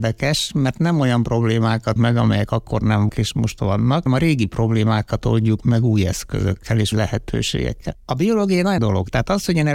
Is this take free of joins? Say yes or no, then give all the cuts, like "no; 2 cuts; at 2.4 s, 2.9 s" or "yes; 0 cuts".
no; 5 cuts; at 2.0 s, 3.1 s, 4.1 s, 6.9 s, 8.8 s